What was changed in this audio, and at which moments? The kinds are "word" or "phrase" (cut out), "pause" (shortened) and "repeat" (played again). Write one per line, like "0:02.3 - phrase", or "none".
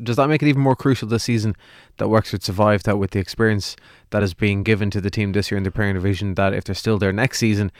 none